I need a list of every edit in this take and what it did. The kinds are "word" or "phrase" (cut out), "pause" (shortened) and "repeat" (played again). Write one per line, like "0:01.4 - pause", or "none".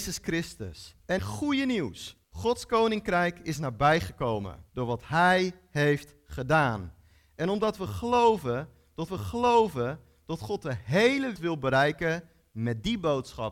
0:01.2 - phrase
0:02.2 - pause
0:04.7 - pause
0:09.1 - repeat
0:11.4 - word